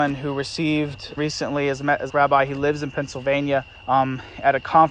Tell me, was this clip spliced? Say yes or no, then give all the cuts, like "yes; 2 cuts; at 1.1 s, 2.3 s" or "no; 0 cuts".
yes; 3 cuts; at 1.2 s, 2.1 s, 3.7 s